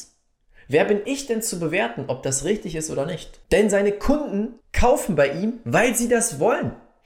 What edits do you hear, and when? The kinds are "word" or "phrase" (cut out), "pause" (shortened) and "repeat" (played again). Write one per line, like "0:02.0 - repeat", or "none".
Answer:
0:03.4 - pause
0:04.6 - pause